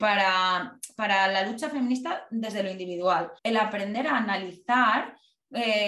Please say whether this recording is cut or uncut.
cut